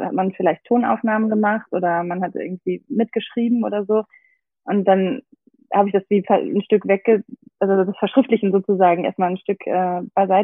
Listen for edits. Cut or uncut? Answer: uncut